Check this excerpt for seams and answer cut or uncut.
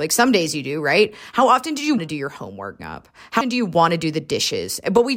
cut